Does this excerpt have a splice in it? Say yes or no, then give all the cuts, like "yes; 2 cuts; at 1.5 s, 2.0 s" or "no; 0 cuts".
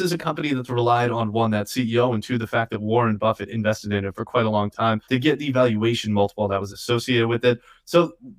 yes; 1 cut; at 5.0 s